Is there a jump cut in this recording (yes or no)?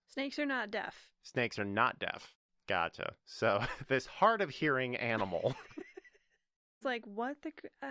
no